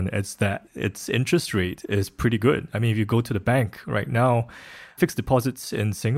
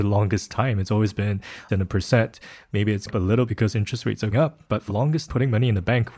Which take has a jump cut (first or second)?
second